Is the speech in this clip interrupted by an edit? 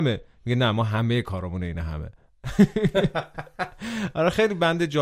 no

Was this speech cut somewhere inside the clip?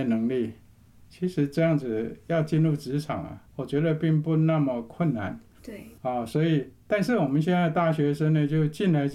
yes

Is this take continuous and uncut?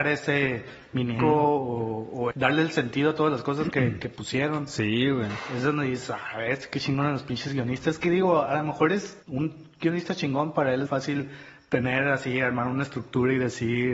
no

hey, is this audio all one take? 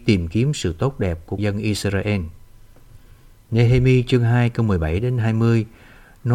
no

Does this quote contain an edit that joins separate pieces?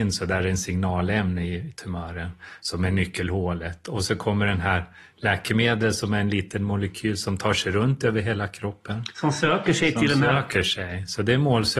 no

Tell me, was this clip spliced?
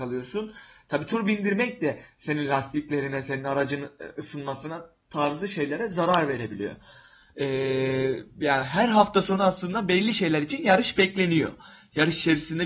no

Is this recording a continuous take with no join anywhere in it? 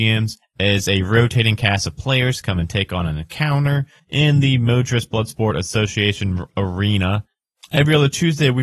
yes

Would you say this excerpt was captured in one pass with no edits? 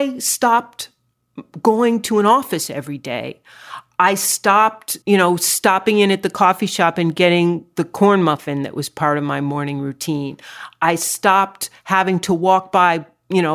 no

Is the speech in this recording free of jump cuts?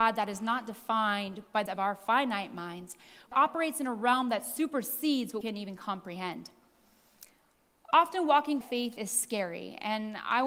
no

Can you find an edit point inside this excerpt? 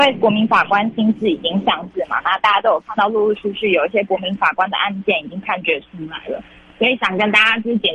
no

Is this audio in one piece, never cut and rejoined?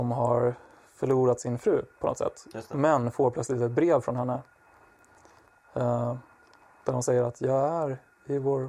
yes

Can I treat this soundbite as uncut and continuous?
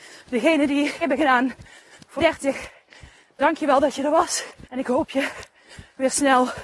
no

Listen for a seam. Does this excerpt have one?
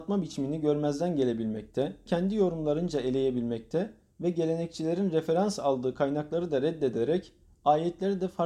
yes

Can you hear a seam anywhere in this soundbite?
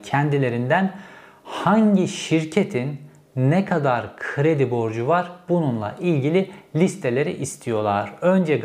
no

